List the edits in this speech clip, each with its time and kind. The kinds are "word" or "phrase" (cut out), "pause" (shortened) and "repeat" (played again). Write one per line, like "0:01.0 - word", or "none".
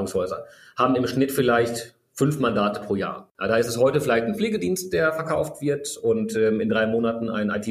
none